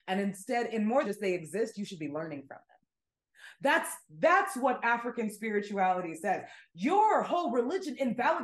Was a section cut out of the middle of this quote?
yes; 1 cut; at 1.0 s

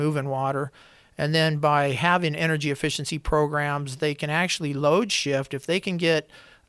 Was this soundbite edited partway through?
no; 0 cuts

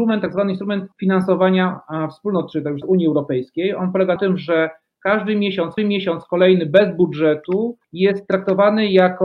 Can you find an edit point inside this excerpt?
yes; 5 cuts; at 0.9 s, 2.8 s, 4.2 s, 5.8 s, 7.8 s

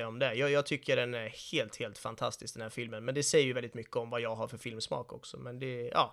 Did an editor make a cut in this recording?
no; 0 cuts

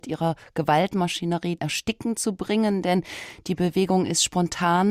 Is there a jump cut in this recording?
yes; 1 cut; at 1.6 s

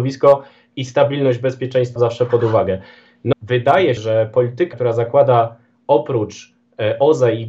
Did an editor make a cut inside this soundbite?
yes; 4 cuts; at 2.0 s, 3.3 s, 4.0 s, 4.7 s

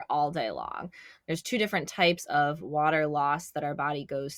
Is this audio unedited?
yes; 0 cuts

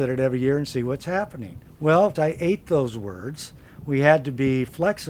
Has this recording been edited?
yes; 2 cuts; at 1.7 s, 2.2 s

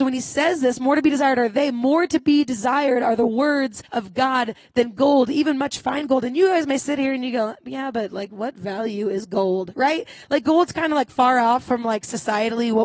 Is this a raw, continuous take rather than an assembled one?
no; 1 cut; at 3.9 s

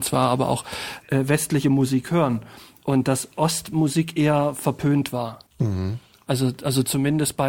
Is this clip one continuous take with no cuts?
no; 1 cut; at 5.5 s

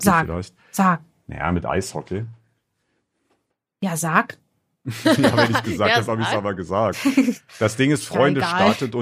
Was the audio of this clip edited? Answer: no; 0 cuts

